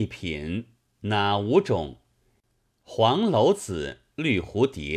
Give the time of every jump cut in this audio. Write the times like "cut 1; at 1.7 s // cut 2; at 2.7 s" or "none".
none